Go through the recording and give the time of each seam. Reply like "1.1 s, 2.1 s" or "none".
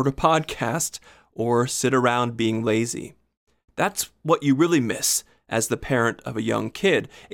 none